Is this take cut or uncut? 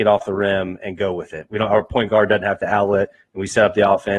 uncut